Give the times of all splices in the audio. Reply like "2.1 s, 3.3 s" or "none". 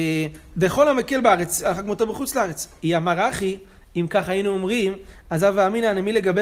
none